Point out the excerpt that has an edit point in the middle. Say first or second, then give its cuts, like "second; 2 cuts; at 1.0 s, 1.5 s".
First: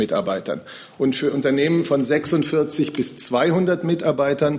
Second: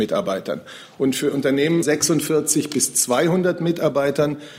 second; 1 cut; at 1.8 s